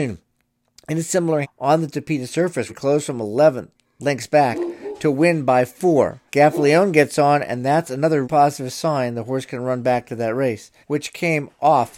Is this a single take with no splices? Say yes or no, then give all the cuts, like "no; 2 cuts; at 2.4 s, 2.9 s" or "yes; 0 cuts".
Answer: no; 5 cuts; at 1.4 s, 2.7 s, 6.3 s, 8.2 s, 10.8 s